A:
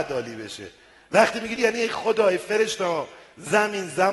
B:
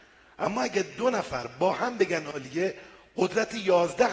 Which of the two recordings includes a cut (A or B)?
A